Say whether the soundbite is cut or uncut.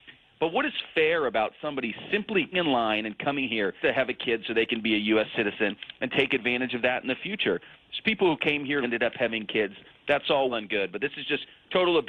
cut